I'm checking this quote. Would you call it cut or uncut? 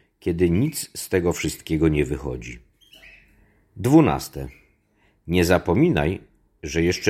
uncut